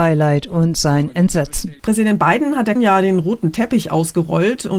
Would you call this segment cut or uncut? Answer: cut